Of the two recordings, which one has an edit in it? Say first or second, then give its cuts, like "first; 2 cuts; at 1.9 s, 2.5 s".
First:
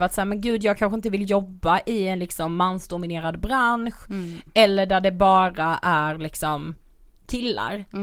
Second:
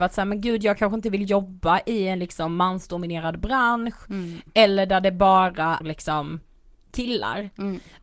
second; 1 cut; at 5.8 s